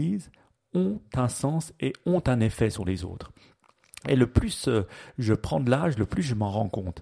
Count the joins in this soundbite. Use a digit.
0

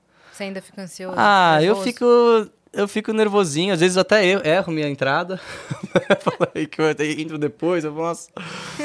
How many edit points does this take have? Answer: 0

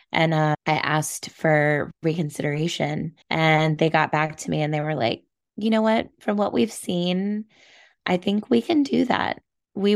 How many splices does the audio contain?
1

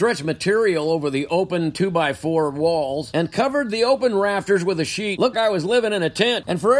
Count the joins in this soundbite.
1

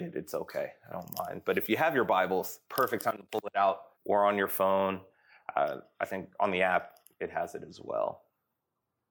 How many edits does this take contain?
2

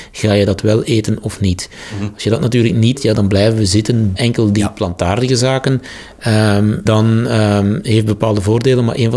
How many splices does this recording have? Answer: 3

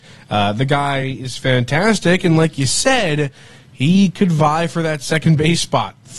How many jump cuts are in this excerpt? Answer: 0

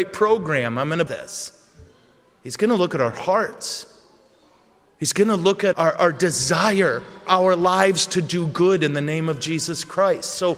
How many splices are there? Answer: 3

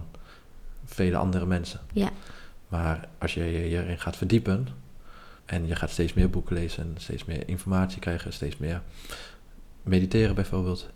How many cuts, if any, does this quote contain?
1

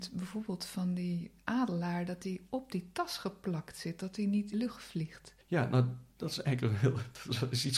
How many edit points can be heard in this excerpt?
3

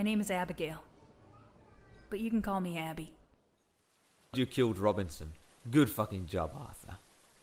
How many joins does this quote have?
2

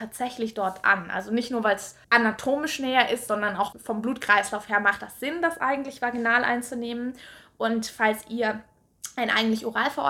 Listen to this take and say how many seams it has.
2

